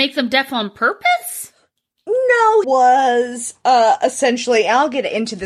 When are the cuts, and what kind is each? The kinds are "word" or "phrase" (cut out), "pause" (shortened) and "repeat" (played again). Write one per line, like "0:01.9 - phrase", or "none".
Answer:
0:02.6 - phrase